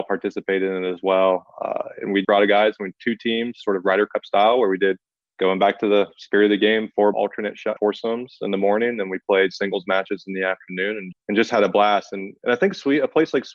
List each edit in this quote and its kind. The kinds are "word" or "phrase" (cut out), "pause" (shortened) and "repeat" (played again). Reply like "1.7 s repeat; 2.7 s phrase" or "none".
2.2 s word; 5.2 s pause; 7.1 s word; 7.8 s word; 11.1 s word